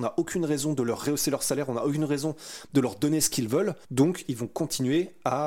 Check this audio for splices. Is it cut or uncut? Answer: cut